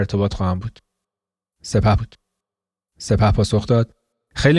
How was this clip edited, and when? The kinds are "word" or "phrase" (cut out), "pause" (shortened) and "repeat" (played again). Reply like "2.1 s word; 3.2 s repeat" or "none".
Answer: 2.0 s repeat